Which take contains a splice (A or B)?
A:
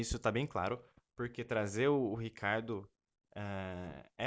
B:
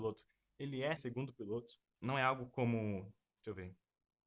B